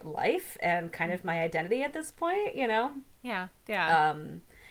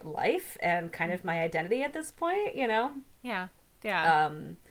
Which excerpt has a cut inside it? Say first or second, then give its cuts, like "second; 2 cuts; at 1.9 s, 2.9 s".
first; 1 cut; at 3.6 s